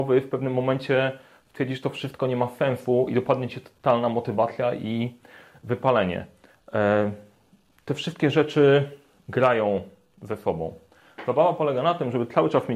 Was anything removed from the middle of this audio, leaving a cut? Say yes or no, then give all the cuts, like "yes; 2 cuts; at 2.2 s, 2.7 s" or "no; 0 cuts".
no; 0 cuts